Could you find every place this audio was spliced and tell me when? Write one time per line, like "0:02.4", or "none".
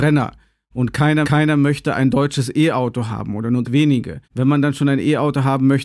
0:01.2
0:03.6
0:04.2